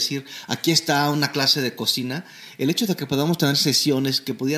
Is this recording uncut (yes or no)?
yes